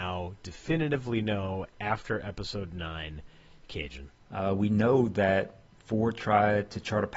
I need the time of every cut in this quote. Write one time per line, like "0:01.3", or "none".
0:04.2